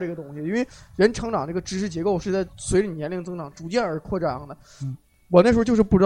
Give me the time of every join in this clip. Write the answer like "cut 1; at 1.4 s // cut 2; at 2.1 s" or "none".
none